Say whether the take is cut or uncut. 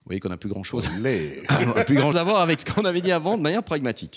cut